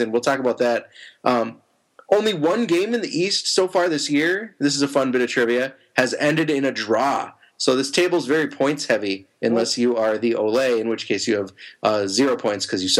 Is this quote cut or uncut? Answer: uncut